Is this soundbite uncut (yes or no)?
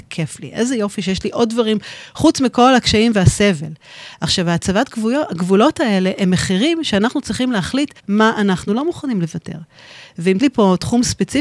no